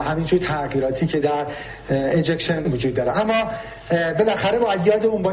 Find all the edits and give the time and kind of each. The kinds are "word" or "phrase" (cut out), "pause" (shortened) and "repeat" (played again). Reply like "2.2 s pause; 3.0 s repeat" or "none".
2.6 s word